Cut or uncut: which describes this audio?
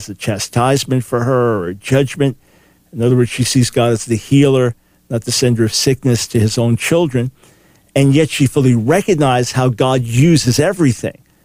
uncut